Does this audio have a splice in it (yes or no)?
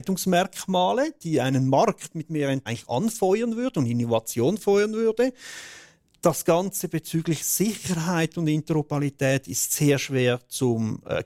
yes